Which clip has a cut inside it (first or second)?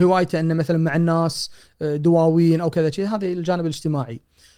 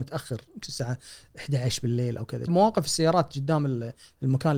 second